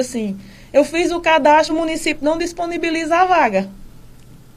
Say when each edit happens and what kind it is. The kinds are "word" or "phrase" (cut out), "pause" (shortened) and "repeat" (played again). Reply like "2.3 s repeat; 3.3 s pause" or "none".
1.7 s word